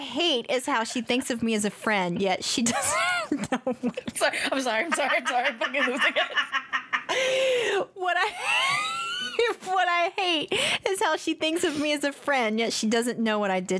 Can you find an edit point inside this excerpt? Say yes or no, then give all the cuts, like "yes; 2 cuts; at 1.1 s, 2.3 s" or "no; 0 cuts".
no; 0 cuts